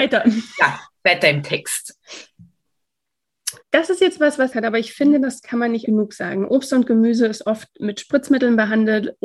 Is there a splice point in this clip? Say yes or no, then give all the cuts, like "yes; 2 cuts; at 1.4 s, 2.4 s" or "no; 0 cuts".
yes; 3 cuts; at 3.6 s, 4.5 s, 5.8 s